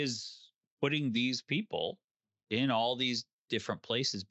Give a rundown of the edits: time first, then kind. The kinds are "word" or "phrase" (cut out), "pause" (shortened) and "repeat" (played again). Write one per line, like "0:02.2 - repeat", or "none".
none